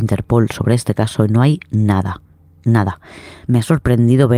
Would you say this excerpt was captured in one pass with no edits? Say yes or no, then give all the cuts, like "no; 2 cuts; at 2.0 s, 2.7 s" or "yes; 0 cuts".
yes; 0 cuts